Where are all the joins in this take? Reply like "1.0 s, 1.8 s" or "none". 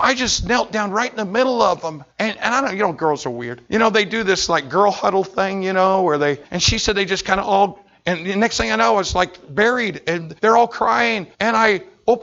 2.1 s, 3.7 s, 6.4 s, 10.4 s, 11.3 s